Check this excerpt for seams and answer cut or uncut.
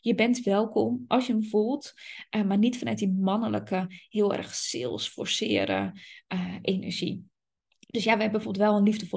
uncut